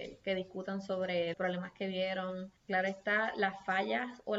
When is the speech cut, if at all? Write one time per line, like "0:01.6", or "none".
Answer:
0:01.3
0:02.6